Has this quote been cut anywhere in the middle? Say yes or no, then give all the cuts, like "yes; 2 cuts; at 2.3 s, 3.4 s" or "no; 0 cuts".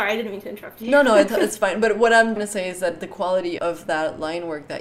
yes; 3 cuts; at 1.3 s, 2.4 s, 3.6 s